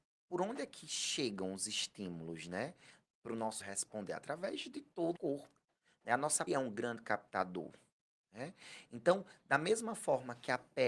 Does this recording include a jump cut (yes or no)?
yes